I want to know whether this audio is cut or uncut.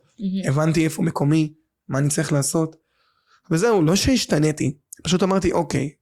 uncut